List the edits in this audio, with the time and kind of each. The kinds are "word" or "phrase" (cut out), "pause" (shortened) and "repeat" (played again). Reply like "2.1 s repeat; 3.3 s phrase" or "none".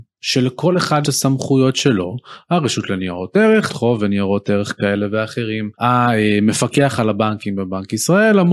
1.0 s word; 3.7 s phrase; 5.7 s pause